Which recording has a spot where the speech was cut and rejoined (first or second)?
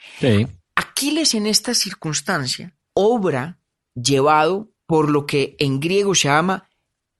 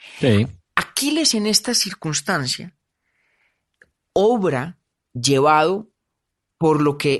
first